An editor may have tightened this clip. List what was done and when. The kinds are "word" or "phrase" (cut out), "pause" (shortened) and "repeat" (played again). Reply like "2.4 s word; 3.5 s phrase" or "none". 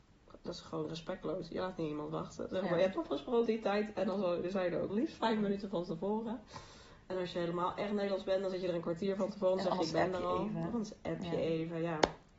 3.5 s word; 4.9 s word